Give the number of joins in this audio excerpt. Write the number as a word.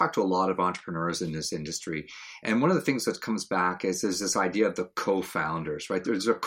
zero